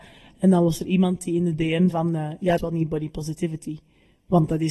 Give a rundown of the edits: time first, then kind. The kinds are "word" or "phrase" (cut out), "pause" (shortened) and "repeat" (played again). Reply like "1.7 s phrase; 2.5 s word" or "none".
1.9 s word; 2.6 s phrase

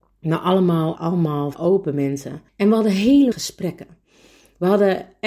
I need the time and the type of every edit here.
1.0 s word; 1.5 s word; 2.5 s pause; 3.3 s word

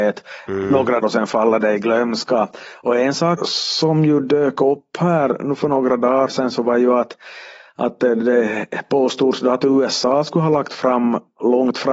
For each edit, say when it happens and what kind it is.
1.0 s word; 3.4 s word

